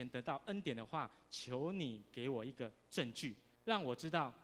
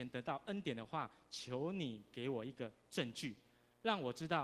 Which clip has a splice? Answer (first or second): first